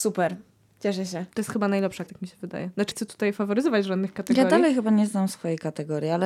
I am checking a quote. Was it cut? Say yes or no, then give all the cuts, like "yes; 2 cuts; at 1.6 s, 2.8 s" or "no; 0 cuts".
yes; 3 cuts; at 1.3 s, 2.1 s, 2.9 s